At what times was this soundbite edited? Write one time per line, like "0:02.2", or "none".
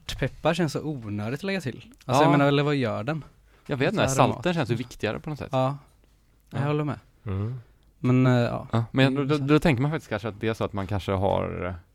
none